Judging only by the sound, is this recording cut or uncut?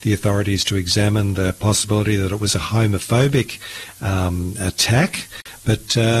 uncut